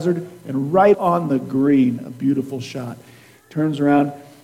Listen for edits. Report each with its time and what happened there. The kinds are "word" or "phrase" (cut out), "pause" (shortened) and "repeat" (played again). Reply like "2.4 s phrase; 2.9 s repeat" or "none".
0.9 s word